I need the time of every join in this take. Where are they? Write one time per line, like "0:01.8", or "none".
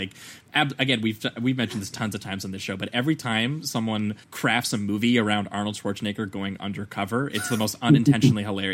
0:04.2